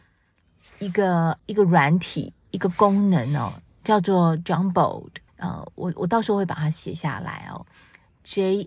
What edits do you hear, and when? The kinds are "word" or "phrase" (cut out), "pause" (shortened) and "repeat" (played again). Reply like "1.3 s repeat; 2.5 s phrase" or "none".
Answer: 1.4 s pause; 5.3 s pause